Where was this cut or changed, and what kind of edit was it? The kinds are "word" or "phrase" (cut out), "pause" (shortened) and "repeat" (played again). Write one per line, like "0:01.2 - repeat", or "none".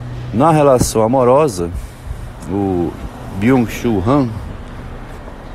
none